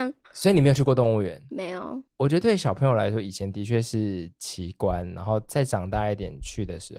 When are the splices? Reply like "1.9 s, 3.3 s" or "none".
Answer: 2.1 s